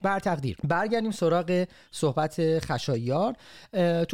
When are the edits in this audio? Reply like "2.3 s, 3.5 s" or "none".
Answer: none